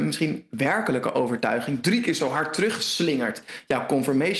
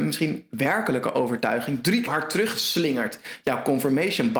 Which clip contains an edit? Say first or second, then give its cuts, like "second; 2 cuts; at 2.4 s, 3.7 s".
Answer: second; 1 cut; at 2.1 s